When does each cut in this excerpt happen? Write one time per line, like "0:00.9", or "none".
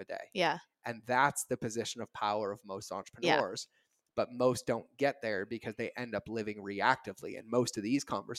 none